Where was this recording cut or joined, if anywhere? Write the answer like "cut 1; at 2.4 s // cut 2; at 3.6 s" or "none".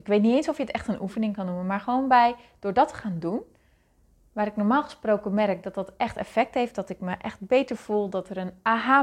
none

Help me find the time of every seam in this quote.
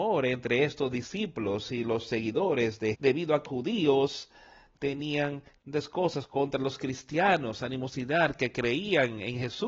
cut 1; at 2.9 s // cut 2; at 3.5 s // cut 3; at 5.6 s

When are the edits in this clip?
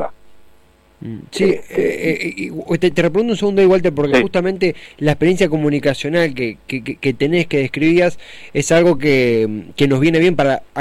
none

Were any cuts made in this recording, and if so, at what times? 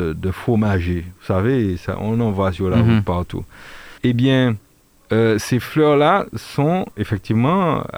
cut 1; at 4.0 s

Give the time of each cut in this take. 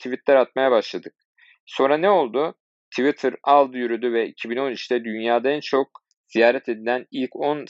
none

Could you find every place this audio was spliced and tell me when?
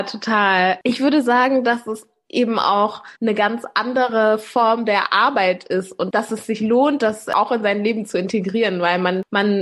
cut 1; at 3.2 s

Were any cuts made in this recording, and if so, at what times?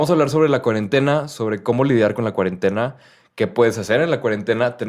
none

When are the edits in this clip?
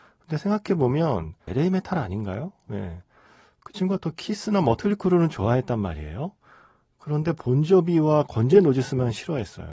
cut 1; at 1.5 s

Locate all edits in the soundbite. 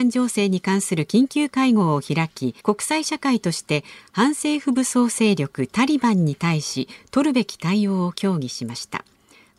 cut 1; at 2.6 s

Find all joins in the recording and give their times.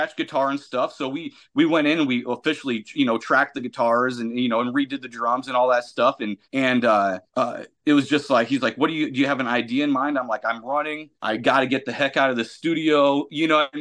cut 1; at 6.4 s // cut 2; at 7.3 s // cut 3; at 11.1 s

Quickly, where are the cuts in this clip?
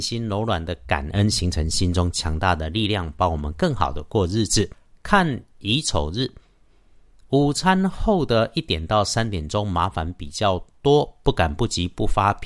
none

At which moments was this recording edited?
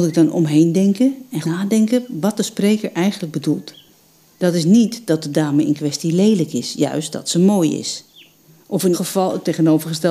cut 1; at 1.4 s // cut 2; at 8.9 s

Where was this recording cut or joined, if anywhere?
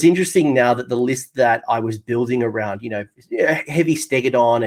none

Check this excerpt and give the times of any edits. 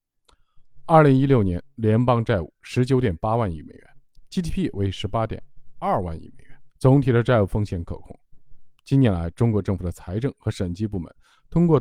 cut 1; at 6.7 s

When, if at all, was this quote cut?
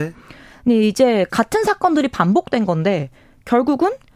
none

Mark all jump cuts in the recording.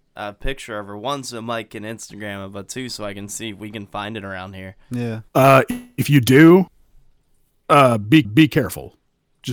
cut 1; at 5.3 s // cut 2; at 8.2 s

